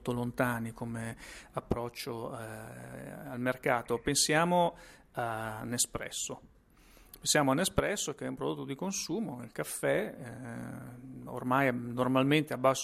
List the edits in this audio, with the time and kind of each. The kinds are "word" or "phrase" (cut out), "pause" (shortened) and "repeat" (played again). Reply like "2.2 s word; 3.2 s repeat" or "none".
none